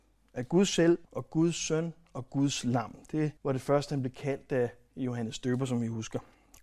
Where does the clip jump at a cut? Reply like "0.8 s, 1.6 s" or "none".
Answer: 1.0 s, 3.4 s